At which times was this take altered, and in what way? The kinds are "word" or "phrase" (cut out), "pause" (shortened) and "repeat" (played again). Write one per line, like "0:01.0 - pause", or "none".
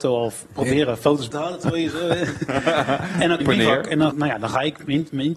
0:01.3 - word
0:03.4 - word
0:04.1 - word